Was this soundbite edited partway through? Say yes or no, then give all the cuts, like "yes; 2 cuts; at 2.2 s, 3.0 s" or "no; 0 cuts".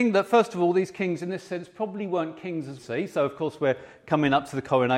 yes; 1 cut; at 2.8 s